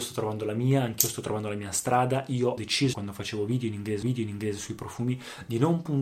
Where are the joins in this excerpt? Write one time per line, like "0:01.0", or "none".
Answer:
0:02.6
0:02.9
0:04.0

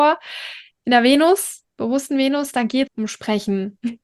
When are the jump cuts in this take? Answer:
0:02.9

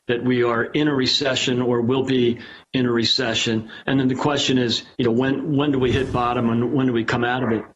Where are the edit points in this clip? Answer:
none

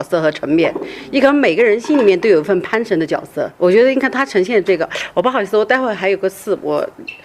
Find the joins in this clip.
0:03.5

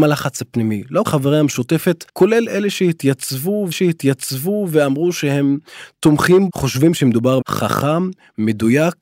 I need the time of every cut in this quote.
0:01.1
0:02.1
0:03.7
0:06.5
0:07.4

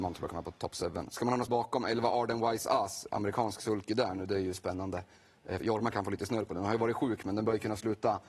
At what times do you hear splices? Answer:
0:01.5
0:03.1
0:05.6

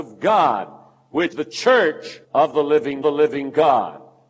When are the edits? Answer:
0:01.3
0:02.2
0:03.0

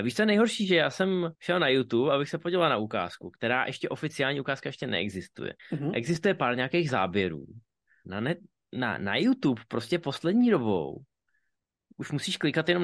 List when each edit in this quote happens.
0:01.3
0:05.6
0:08.0

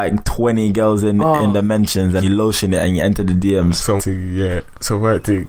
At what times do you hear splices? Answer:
0:02.2
0:04.0

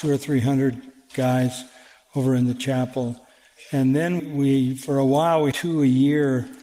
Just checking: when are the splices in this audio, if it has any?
0:04.2
0:05.5

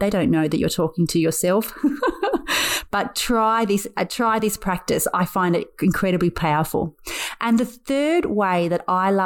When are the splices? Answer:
none

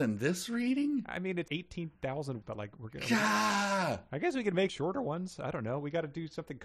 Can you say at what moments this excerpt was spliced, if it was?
0:01.5
0:02.4
0:04.7

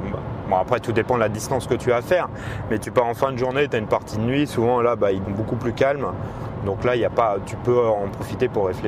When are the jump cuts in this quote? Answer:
0:05.2

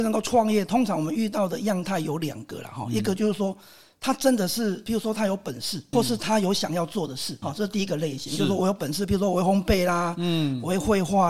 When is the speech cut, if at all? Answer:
0:05.9
0:07.4

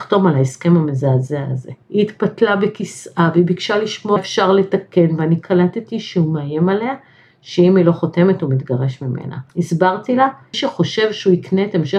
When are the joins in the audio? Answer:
0:01.8
0:04.2
0:09.5
0:10.5

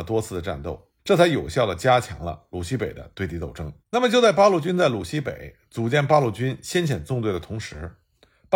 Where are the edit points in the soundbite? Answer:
0:01.0
0:03.8

